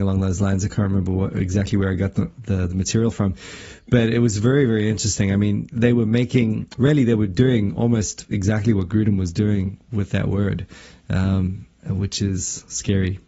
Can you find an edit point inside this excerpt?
no; 0 cuts

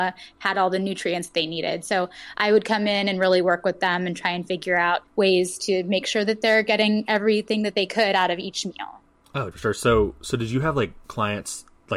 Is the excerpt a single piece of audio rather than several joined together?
no; 3 cuts; at 5.1 s, 9.5 s, 11.0 s

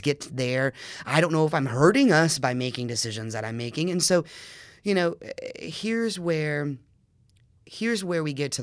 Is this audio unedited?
yes; 0 cuts

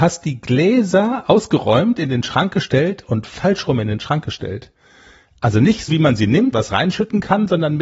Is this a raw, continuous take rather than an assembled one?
no; 2 cuts; at 5.9 s, 6.5 s

